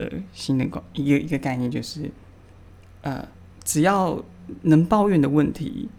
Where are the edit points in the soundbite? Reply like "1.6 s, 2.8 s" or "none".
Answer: 3.3 s